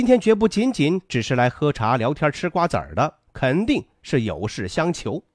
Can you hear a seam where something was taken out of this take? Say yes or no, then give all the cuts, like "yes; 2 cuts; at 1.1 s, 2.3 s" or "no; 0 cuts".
yes; 1 cut; at 3.3 s